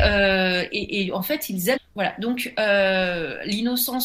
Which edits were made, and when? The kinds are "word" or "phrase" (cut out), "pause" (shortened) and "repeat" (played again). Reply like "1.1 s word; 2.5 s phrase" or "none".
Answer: 1.8 s phrase